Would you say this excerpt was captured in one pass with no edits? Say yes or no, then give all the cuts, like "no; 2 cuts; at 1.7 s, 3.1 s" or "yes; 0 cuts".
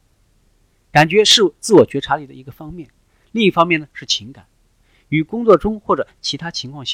yes; 0 cuts